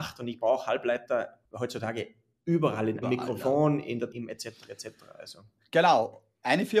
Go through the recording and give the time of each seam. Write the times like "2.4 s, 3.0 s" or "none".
1.5 s, 3.0 s, 4.1 s